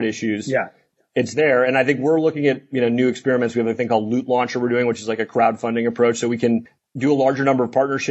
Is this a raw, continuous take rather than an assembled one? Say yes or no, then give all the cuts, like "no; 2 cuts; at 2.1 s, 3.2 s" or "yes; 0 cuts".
yes; 0 cuts